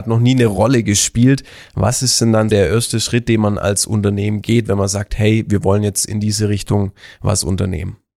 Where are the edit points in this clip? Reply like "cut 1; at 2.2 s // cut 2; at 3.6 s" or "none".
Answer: cut 1; at 2.5 s